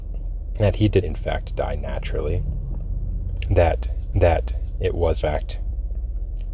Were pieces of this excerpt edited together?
yes; 3 cuts; at 1.0 s, 4.1 s, 5.1 s

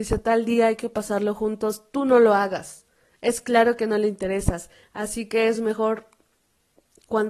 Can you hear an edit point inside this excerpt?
no; 0 cuts

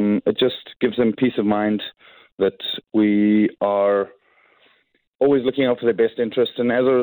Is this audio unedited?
yes; 0 cuts

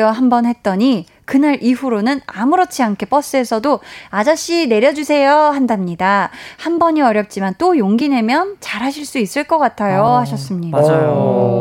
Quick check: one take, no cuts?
yes; 0 cuts

